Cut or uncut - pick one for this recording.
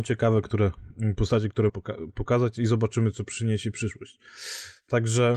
cut